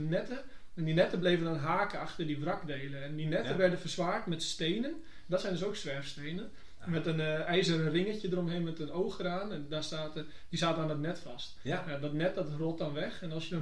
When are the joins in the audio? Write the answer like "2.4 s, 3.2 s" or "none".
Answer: none